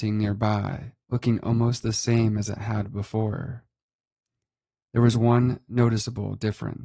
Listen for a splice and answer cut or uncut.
cut